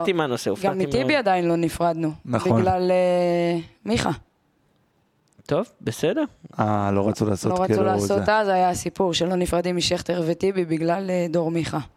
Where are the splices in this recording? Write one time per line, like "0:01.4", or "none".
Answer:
none

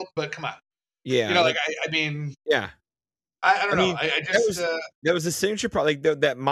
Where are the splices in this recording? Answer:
none

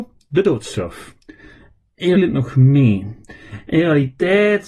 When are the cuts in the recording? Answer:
0:02.2

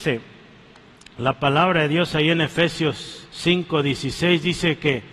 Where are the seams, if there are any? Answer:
0:03.3

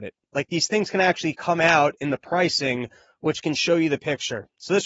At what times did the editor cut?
none

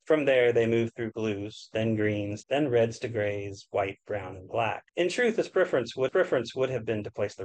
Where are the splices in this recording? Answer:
0:02.4
0:04.9
0:06.1

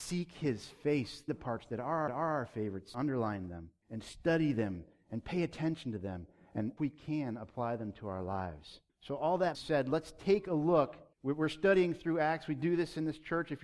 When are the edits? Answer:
0:01.3
0:02.1
0:02.9
0:03.8
0:06.8
0:08.9
0:09.5
0:11.1

